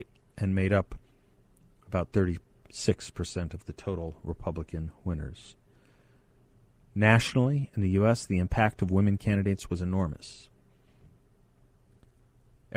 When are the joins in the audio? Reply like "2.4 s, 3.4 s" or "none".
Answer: none